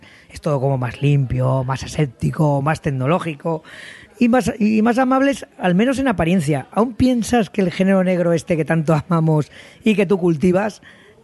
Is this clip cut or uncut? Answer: uncut